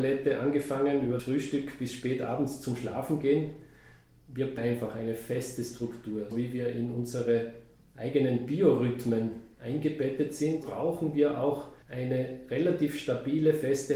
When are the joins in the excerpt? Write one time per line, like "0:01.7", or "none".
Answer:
0:01.2
0:04.6
0:06.3
0:10.6
0:11.8